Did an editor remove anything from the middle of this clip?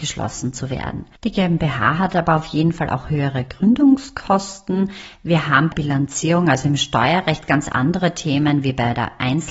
yes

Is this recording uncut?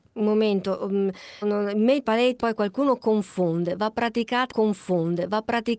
no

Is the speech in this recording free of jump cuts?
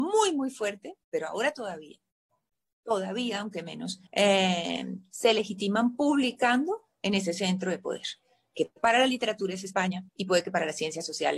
no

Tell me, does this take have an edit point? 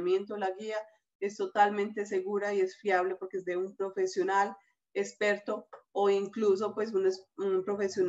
no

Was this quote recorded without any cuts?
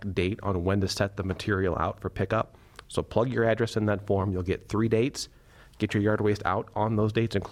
yes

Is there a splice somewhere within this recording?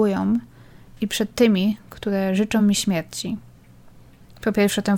no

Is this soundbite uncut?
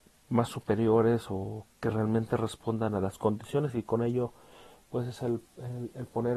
yes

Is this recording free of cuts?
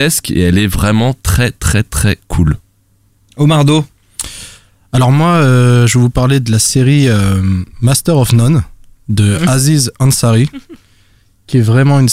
yes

